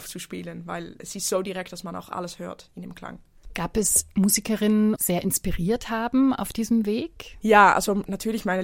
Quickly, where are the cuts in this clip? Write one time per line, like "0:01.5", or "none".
0:05.0